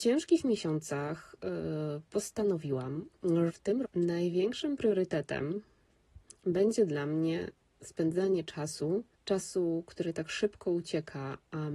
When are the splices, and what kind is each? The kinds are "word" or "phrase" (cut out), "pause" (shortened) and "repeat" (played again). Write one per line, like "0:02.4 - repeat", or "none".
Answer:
0:03.5 - word
0:03.8 - word
0:09.1 - pause